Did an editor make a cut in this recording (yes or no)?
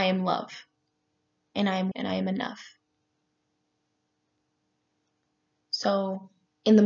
yes